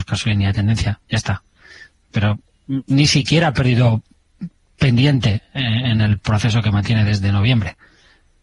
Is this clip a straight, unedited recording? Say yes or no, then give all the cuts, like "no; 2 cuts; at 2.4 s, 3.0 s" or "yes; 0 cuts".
yes; 0 cuts